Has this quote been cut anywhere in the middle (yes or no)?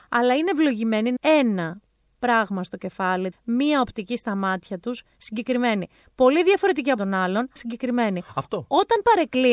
yes